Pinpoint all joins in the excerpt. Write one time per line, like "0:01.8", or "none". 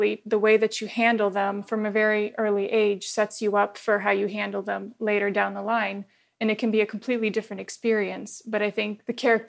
none